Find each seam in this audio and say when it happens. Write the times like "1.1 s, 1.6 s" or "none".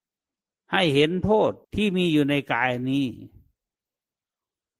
1.6 s